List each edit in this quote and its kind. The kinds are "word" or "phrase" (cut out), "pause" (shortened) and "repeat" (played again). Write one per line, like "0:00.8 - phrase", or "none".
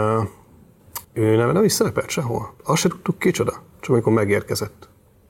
0:01.0 - pause
0:02.6 - pause